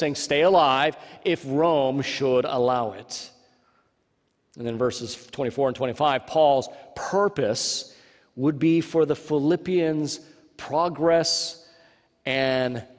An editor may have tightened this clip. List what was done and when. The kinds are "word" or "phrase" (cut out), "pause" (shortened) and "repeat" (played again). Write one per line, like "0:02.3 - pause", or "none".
none